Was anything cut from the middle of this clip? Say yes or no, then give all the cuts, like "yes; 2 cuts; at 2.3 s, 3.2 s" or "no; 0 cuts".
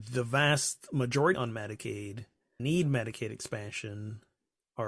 yes; 2 cuts; at 1.3 s, 2.6 s